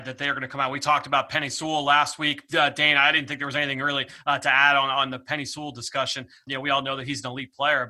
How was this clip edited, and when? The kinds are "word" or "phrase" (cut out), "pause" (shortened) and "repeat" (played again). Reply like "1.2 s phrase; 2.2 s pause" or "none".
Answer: none